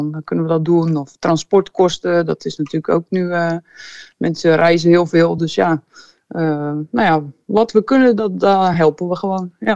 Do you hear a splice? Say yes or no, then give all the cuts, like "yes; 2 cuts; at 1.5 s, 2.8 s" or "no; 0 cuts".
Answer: no; 0 cuts